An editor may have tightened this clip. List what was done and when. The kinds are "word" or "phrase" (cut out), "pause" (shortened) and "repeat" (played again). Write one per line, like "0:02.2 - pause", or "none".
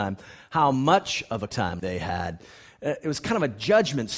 0:01.5 - word
0:01.8 - word